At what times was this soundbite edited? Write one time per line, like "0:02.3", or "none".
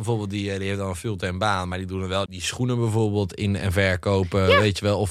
0:02.3